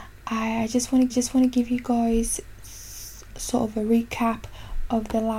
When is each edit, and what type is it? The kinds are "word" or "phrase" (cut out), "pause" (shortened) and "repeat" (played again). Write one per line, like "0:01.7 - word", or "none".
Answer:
0:01.1 - repeat
0:03.3 - word